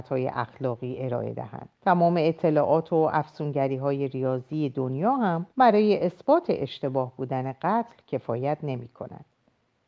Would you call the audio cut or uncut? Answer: cut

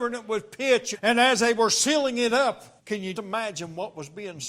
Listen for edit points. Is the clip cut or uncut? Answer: cut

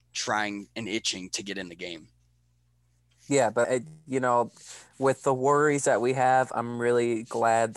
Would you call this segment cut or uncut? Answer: cut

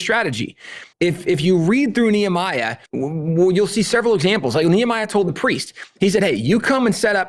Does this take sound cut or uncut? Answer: cut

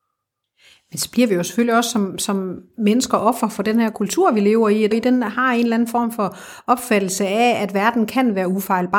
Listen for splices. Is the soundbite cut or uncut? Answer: cut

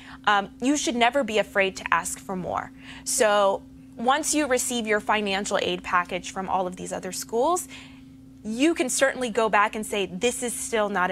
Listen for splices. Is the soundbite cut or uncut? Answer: uncut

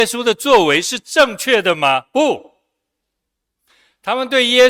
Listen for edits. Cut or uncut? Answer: uncut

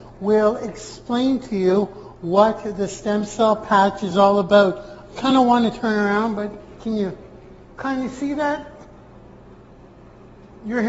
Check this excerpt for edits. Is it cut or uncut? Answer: uncut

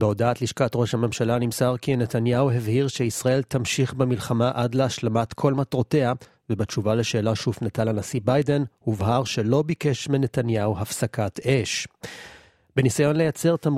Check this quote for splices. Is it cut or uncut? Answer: uncut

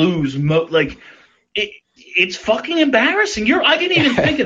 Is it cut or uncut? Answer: cut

